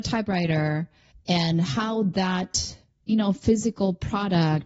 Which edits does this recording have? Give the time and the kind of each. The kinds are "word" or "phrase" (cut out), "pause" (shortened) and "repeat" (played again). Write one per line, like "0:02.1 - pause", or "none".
none